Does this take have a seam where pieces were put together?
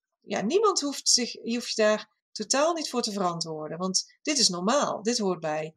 yes; 1 cut; at 2.2 s

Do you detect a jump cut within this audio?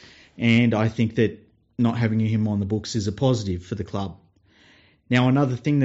no; 0 cuts

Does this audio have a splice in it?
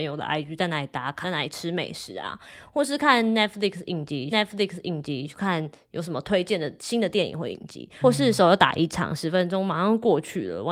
yes; 3 cuts; at 1.2 s, 4.3 s, 8.0 s

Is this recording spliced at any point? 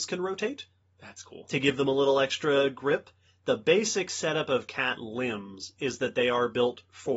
no; 0 cuts

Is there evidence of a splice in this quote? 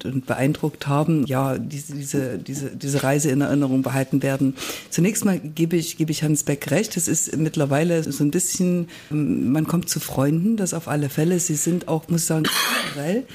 yes; 3 cuts; at 1.2 s, 8.0 s, 9.1 s

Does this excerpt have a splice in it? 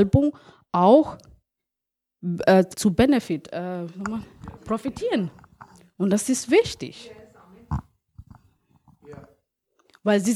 yes; 2 cuts; at 2.7 s, 4.6 s

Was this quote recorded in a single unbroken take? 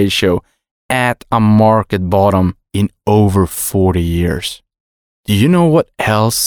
yes; 0 cuts

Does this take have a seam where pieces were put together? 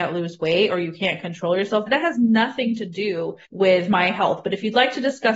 yes; 2 cuts; at 1.9 s, 3.4 s

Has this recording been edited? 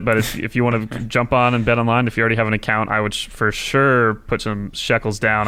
no; 0 cuts

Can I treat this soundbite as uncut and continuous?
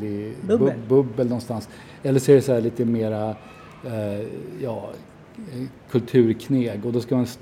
yes; 0 cuts

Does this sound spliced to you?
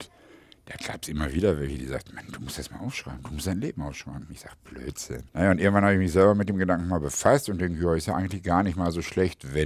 yes; 1 cut; at 5.3 s

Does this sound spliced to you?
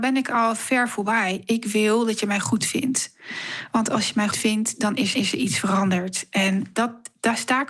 yes; 3 cuts; at 4.3 s, 5.1 s, 6.7 s

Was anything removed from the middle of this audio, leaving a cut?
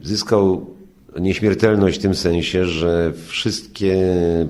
no; 0 cuts

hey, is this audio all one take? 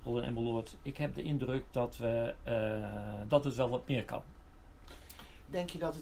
yes; 0 cuts

